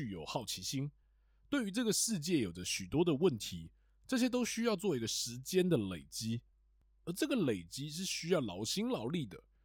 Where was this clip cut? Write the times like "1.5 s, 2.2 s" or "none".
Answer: none